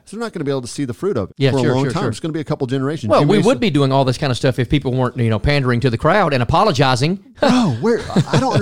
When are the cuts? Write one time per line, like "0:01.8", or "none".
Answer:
0:01.3